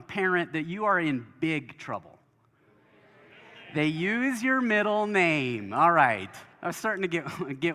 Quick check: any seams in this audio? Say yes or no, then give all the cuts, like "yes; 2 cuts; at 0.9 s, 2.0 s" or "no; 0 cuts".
yes; 1 cut; at 6.5 s